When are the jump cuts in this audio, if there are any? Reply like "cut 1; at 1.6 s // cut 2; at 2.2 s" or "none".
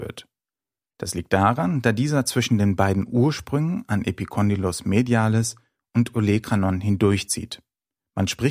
none